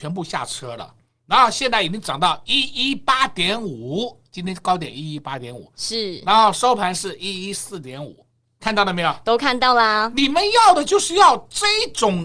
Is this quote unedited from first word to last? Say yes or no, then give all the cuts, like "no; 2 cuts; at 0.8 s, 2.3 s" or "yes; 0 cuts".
yes; 0 cuts